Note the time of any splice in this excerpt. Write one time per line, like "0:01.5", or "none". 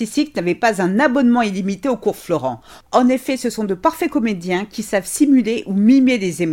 none